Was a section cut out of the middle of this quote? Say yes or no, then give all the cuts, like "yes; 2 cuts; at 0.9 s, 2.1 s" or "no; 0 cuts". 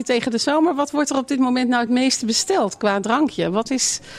no; 0 cuts